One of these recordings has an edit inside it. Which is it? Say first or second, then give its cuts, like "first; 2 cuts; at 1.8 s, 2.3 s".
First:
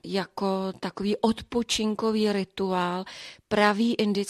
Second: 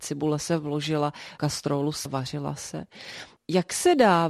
second; 2 cuts; at 1.4 s, 2.1 s